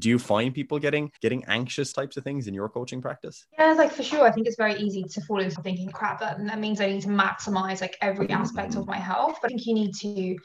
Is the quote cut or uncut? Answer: cut